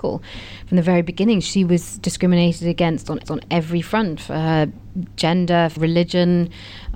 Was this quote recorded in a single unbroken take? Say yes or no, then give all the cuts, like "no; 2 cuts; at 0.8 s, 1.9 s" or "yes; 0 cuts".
no; 2 cuts; at 3.2 s, 5.8 s